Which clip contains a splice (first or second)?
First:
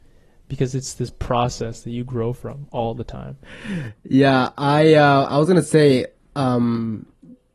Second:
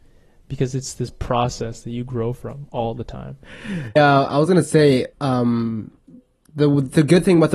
second